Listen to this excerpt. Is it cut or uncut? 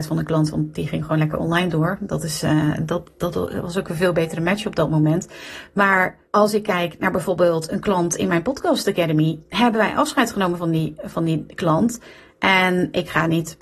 cut